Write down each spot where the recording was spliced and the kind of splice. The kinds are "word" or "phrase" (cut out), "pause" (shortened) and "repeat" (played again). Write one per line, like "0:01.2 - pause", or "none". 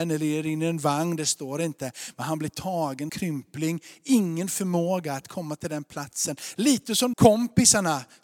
0:03.1 - word
0:07.1 - word